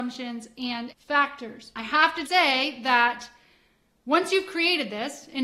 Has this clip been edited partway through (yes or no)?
yes